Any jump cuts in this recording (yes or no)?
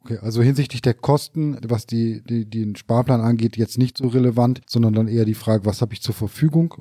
yes